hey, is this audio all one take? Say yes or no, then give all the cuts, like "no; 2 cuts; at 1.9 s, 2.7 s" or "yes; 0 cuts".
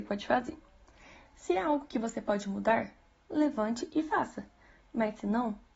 yes; 0 cuts